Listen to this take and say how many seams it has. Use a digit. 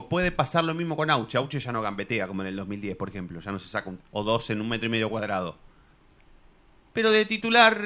1